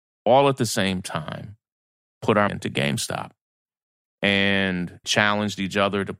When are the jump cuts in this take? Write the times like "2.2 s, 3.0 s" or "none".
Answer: 2.5 s, 5.0 s